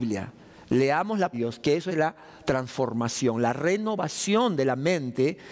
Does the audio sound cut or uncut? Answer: cut